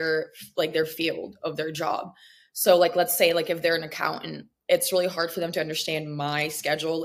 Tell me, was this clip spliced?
no; 0 cuts

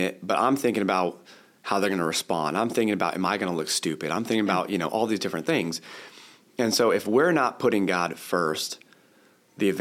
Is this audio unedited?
yes; 0 cuts

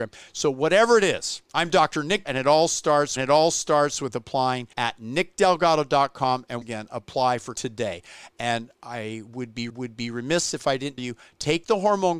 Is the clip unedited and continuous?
no; 8 cuts; at 1.5 s, 2.3 s, 3.2 s, 4.7 s, 6.6 s, 7.5 s, 9.7 s, 11.0 s

